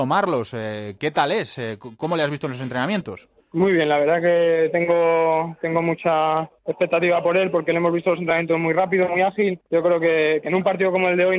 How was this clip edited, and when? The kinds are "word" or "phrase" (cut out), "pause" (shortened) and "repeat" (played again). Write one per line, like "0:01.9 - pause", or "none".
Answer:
0:03.4 - pause
0:06.6 - pause
0:09.7 - pause